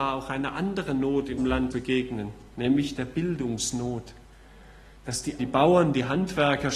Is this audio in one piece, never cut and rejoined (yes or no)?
no